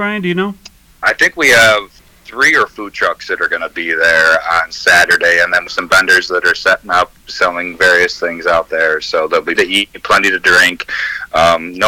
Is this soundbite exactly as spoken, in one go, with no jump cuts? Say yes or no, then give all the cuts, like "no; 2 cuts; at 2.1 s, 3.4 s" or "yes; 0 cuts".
no; 4 cuts; at 2.0 s, 2.7 s, 5.7 s, 9.5 s